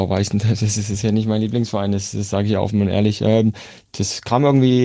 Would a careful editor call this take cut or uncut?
uncut